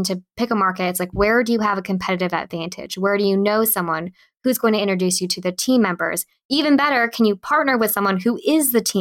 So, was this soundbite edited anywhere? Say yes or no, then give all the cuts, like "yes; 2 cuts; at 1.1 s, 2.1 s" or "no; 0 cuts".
no; 0 cuts